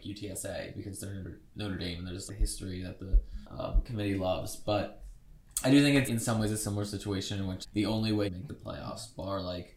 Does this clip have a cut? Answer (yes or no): yes